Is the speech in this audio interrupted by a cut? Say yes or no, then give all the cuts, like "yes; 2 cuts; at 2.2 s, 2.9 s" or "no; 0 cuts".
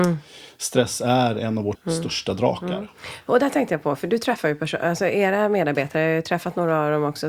yes; 1 cut; at 1.7 s